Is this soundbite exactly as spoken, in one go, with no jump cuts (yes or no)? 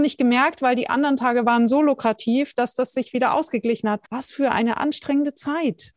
no